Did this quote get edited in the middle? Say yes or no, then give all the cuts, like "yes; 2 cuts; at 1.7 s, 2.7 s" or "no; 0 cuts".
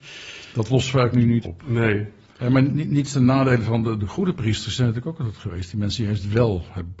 yes; 2 cuts; at 1.4 s, 4.0 s